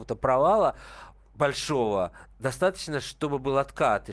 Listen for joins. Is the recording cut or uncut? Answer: uncut